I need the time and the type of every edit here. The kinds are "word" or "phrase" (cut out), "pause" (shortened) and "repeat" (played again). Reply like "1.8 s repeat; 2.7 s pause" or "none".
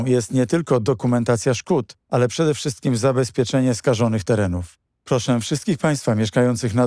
2.0 s pause

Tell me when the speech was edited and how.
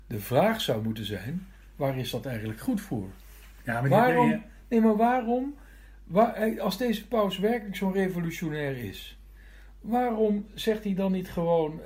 none

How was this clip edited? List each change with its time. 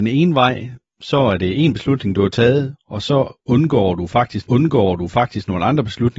4.4 s repeat

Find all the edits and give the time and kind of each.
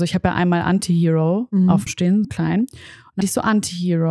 1.9 s word; 2.2 s word; 3.2 s word

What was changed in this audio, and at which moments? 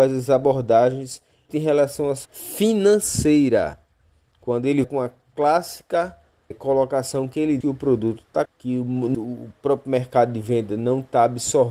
1.5 s word; 2.2 s word; 4.8 s word; 6.5 s word; 7.6 s word; 8.5 s word; 9.1 s word

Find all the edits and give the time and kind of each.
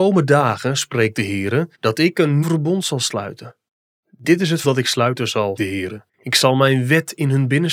1.7 s pause; 2.4 s word; 4.6 s word; 5.6 s word; 6.1 s pause

